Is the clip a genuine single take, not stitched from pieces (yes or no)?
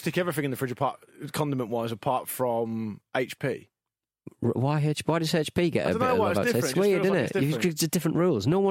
yes